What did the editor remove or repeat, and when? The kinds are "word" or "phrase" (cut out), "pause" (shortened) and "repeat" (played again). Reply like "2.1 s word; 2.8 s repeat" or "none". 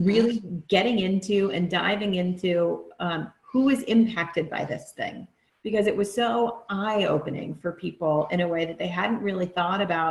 none